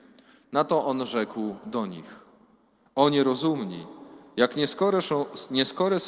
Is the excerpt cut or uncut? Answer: uncut